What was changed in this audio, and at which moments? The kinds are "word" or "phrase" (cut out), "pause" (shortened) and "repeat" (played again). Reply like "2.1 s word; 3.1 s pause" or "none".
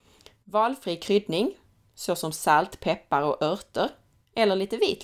none